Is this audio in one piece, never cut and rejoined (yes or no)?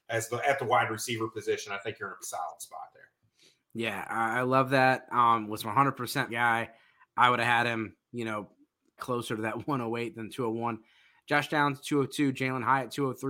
no